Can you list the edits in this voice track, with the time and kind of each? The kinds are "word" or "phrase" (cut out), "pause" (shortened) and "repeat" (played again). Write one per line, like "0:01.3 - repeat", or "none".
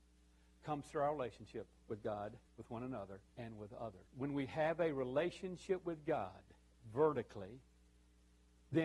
0:02.5 - pause
0:03.3 - pause
0:04.1 - pause